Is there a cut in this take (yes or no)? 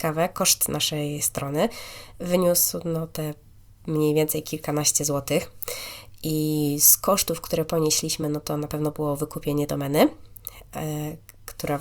no